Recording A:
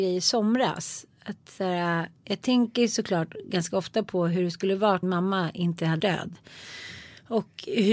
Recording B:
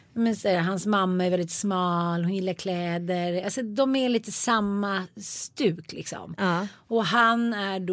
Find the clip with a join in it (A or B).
A